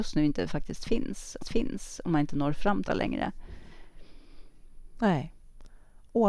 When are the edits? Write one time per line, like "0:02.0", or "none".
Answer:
0:01.4
0:02.9